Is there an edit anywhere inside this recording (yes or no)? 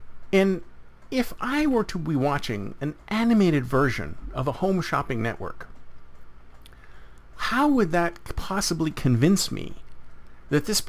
no